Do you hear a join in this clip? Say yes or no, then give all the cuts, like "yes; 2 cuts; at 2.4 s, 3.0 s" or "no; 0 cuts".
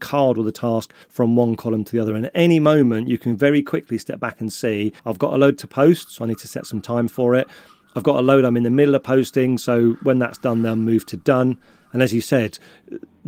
yes; 2 cuts; at 1.0 s, 5.0 s